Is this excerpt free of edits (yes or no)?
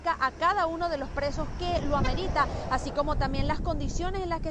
yes